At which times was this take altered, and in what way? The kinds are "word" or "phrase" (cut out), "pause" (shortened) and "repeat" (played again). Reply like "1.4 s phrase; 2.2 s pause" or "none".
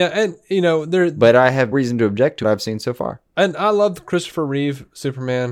1.7 s word; 2.4 s phrase